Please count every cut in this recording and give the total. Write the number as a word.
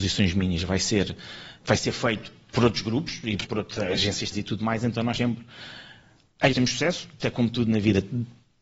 six